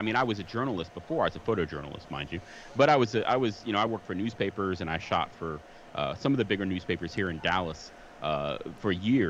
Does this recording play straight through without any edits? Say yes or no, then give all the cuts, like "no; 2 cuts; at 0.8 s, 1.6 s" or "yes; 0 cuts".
yes; 0 cuts